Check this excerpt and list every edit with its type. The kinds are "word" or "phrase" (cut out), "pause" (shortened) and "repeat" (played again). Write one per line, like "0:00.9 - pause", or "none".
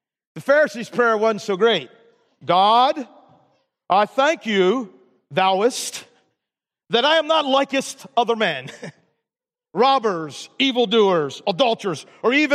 none